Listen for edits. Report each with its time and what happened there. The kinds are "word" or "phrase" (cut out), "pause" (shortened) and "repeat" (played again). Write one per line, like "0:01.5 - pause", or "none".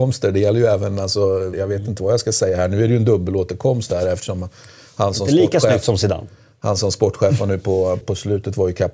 0:01.5 - word
0:08.0 - word